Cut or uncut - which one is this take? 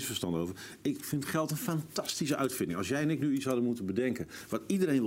uncut